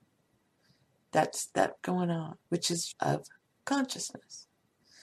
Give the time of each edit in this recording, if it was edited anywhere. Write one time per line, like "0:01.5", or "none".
0:01.8
0:02.4
0:02.9